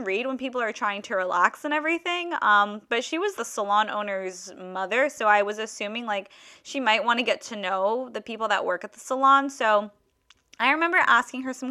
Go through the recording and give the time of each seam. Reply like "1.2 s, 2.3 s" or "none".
3.4 s